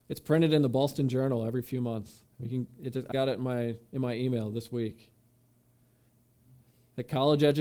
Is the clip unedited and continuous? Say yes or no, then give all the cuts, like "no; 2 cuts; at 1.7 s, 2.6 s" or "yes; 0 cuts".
no; 2 cuts; at 2.3 s, 3.1 s